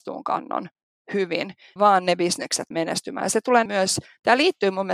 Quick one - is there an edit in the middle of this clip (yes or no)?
yes